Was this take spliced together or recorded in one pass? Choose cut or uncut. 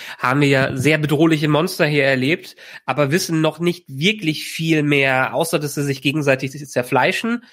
uncut